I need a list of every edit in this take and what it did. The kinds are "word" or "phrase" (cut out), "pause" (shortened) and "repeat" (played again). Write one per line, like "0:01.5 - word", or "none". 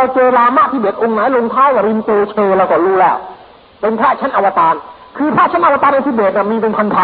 none